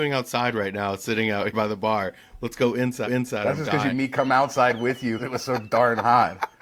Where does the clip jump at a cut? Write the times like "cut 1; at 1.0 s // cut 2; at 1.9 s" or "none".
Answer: cut 1; at 1.5 s // cut 2; at 3.1 s // cut 3; at 3.9 s // cut 4; at 5.2 s